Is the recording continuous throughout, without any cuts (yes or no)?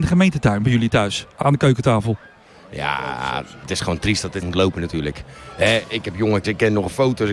no